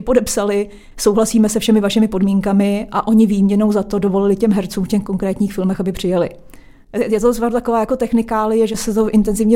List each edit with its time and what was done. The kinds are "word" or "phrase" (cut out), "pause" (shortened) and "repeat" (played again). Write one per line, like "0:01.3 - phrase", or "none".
none